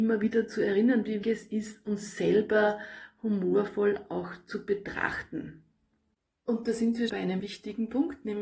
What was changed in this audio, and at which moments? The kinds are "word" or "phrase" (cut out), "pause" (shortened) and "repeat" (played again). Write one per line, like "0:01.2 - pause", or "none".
0:01.2 - word
0:07.1 - word
0:07.4 - word

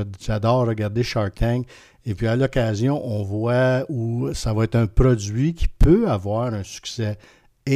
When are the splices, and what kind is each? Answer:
none

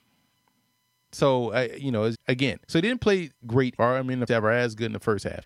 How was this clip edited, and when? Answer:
0:02.1 - word
0:02.6 - pause
0:03.4 - word
0:03.8 - phrase
0:04.3 - word

